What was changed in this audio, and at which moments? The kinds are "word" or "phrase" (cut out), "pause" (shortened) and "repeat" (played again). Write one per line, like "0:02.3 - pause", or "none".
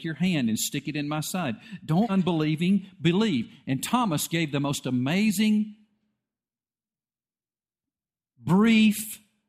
0:02.1 - word